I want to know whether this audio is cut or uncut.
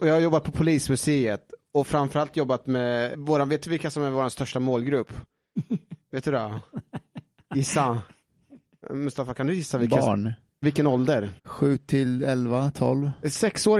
cut